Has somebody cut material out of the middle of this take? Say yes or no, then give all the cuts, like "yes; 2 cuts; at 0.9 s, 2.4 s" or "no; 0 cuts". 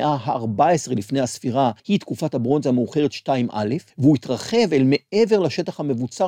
yes; 2 cuts; at 1.8 s, 3.9 s